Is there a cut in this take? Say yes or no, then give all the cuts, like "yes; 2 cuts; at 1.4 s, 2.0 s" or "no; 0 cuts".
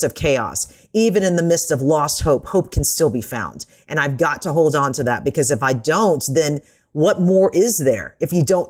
no; 0 cuts